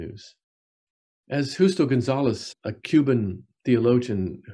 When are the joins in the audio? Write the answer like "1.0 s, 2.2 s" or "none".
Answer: 2.5 s